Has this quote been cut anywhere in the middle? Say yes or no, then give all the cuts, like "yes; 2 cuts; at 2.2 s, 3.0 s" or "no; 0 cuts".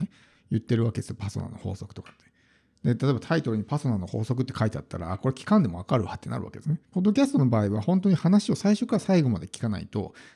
yes; 1 cut; at 6.8 s